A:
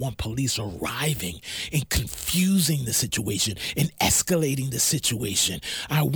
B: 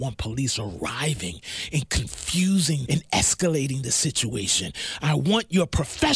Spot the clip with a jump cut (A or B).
B